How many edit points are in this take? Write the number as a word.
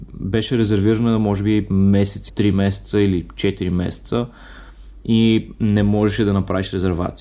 one